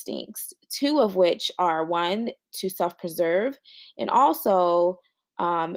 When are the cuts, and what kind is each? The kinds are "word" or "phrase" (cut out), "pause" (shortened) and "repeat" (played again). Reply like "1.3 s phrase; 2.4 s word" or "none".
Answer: none